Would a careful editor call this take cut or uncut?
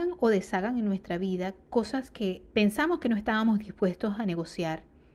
cut